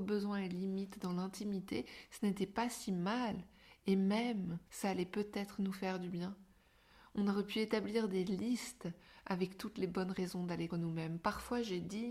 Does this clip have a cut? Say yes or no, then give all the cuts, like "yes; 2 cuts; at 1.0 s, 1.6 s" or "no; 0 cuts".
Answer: yes; 2 cuts; at 4.7 s, 10.7 s